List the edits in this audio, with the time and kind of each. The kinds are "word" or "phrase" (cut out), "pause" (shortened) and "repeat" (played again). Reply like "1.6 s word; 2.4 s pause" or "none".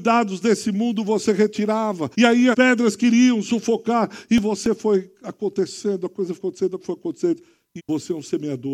2.1 s pause; 2.5 s word; 6.4 s word; 6.8 s word; 7.8 s word